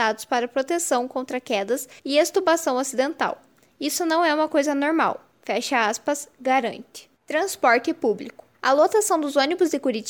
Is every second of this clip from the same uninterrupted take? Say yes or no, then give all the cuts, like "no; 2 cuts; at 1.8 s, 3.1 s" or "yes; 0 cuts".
no; 3 cuts; at 2.0 s, 7.2 s, 8.5 s